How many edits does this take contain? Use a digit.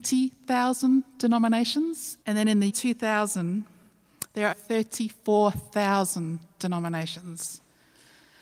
3